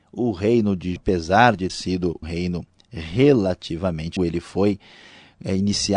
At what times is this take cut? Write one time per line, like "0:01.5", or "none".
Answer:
0:01.0
0:01.7
0:02.2
0:04.2